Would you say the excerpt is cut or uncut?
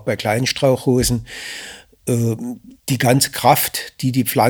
cut